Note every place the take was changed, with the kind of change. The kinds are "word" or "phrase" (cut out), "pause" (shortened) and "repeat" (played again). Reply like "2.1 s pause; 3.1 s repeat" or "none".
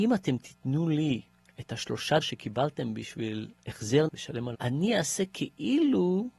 2.2 s word; 4.1 s word; 4.5 s word